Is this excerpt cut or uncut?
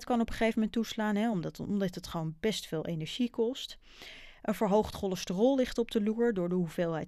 uncut